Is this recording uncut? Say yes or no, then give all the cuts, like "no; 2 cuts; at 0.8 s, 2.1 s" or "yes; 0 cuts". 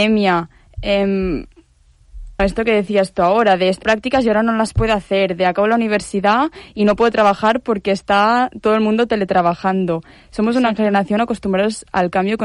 no; 2 cuts; at 2.4 s, 3.8 s